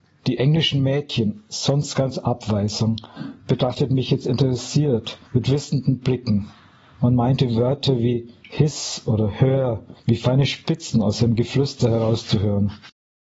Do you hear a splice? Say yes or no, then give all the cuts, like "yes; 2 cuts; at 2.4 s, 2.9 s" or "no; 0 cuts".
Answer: yes; 2 cuts; at 5.3 s, 10.0 s